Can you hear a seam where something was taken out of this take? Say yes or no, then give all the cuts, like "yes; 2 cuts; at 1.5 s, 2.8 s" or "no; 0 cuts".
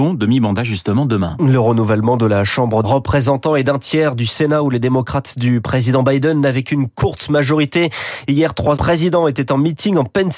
yes; 2 cuts; at 2.8 s, 8.8 s